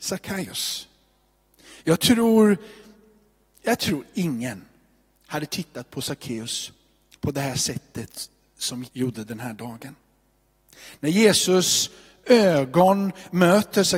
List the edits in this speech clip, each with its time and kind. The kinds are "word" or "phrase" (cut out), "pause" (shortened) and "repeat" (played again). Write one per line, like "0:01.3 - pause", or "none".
0:08.8 - word